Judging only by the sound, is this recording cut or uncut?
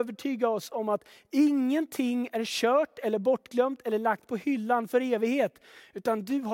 uncut